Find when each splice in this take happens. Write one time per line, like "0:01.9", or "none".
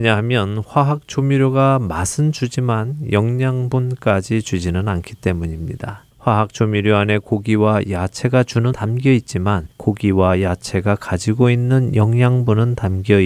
0:06.1
0:08.7
0:09.7